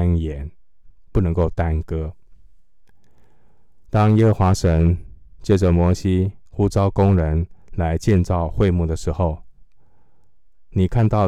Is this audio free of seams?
no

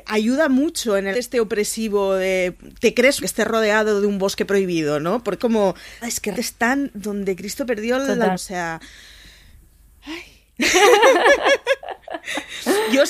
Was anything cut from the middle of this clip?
yes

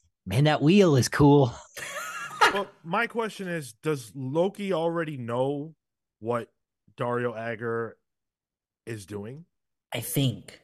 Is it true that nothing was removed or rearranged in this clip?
yes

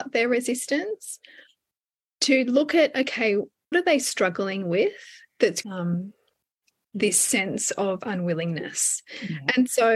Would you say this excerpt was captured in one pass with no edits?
no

